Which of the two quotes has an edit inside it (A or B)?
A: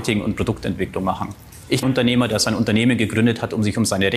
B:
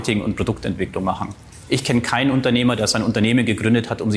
A